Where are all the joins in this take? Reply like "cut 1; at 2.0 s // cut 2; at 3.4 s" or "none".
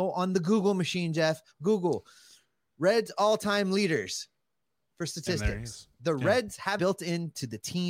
cut 1; at 6.8 s